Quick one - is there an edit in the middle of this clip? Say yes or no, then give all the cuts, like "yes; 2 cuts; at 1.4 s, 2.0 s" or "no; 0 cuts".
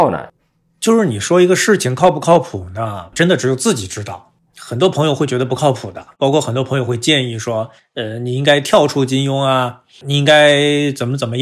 yes; 2 cuts; at 6.1 s, 7.8 s